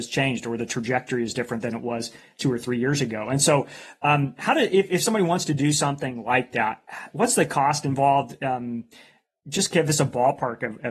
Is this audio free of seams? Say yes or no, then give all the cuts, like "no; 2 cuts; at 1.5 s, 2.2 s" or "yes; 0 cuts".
yes; 0 cuts